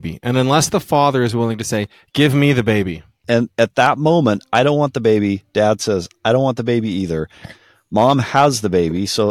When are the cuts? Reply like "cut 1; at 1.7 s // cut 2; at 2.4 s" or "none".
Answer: none